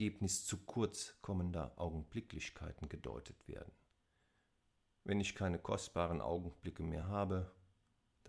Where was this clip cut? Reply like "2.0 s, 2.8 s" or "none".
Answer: none